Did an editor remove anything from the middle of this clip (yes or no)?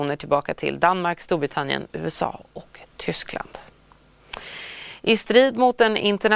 no